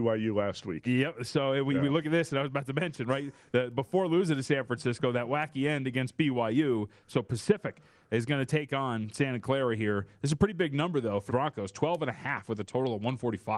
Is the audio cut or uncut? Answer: cut